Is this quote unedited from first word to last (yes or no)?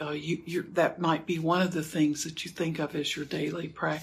yes